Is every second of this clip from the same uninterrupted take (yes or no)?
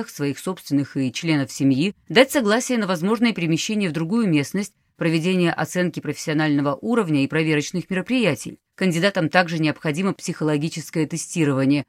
no